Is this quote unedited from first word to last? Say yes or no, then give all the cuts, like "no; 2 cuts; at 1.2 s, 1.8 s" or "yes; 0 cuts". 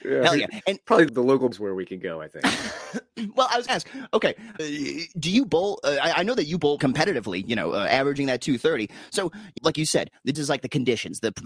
no; 7 cuts; at 1.1 s, 1.5 s, 3.7 s, 4.6 s, 6.8 s, 9.6 s, 10.3 s